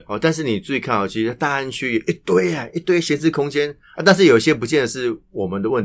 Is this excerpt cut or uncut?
uncut